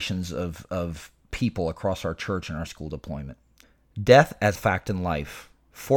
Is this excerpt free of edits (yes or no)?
no